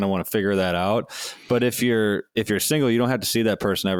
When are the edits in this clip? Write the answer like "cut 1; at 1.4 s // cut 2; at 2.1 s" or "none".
none